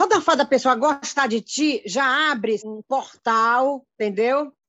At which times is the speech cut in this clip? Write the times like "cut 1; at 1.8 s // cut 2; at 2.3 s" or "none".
cut 1; at 2.6 s